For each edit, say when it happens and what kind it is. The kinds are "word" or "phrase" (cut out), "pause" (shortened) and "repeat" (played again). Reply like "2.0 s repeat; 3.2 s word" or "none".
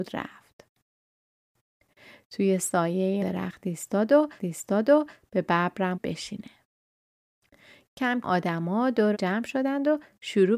3.2 s word; 4.4 s repeat; 5.9 s phrase; 8.2 s word; 9.1 s word

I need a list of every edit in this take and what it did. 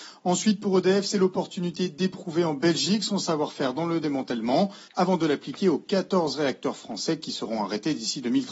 4.9 s pause

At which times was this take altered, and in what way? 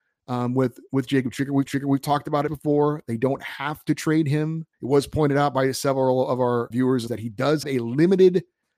1.7 s repeat; 2.5 s phrase; 4.7 s pause; 6.7 s word; 7.1 s word; 7.6 s word

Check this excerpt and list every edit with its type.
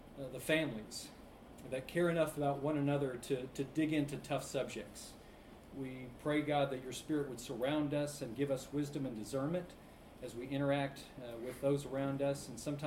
none

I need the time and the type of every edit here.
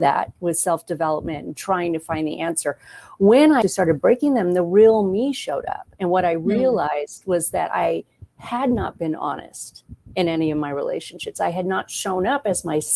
3.6 s word

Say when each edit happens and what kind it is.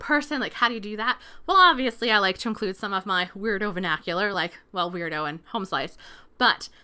none

